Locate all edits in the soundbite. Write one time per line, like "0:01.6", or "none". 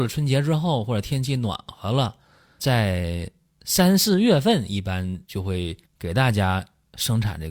0:02.6
0:05.2
0:05.9